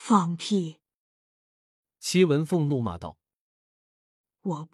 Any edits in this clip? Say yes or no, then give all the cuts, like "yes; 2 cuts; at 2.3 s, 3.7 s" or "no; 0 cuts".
no; 0 cuts